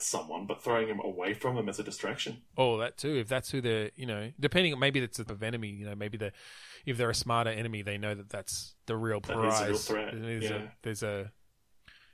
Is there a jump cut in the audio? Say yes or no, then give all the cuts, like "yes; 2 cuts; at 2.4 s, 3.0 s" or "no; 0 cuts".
yes; 2 cuts; at 5.3 s, 8.8 s